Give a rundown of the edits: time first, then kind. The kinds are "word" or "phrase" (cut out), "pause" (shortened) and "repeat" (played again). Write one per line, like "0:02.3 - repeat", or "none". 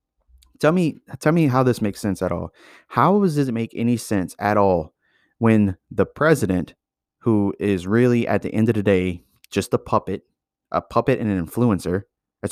none